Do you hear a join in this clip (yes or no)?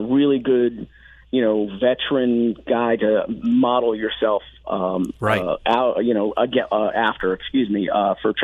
no